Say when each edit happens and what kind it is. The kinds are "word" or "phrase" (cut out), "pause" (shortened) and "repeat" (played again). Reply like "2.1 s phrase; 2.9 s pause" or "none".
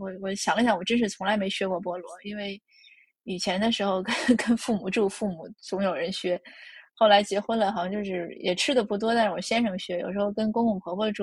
none